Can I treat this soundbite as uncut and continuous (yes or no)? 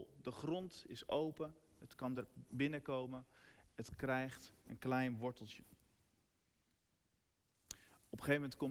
yes